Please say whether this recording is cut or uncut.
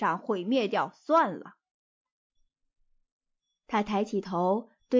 uncut